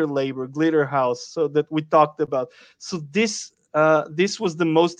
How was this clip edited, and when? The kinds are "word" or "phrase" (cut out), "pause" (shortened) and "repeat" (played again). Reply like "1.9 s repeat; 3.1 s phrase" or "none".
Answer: none